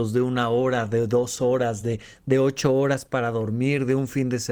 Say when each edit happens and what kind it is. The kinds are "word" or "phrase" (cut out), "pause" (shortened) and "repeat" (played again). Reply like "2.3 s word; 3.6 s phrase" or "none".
none